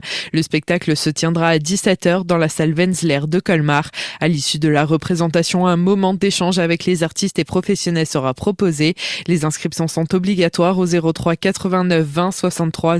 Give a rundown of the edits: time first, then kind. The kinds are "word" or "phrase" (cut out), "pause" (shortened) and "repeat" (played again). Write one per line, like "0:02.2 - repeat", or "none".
none